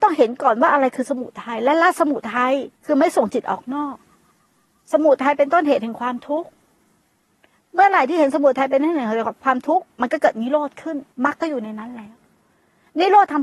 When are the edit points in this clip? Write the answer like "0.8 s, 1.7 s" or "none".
2.8 s, 11.1 s